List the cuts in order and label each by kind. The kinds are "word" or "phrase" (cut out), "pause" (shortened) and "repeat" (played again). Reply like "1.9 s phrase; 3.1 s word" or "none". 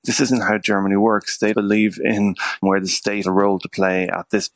1.5 s word; 2.6 s word; 3.2 s word